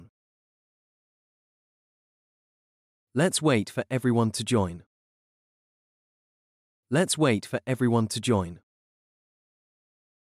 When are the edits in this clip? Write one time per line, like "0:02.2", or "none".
none